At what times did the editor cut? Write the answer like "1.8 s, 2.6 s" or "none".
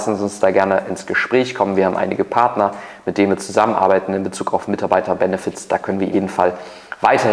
6.1 s